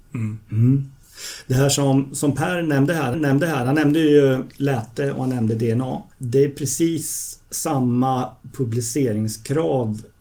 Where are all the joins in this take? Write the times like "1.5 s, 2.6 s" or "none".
3.1 s, 6.1 s